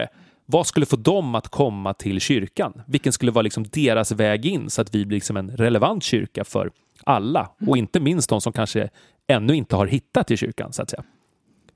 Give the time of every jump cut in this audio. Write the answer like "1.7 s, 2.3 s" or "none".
none